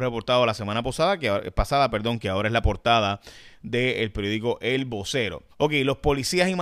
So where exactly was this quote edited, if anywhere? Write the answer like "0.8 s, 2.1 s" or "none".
5.5 s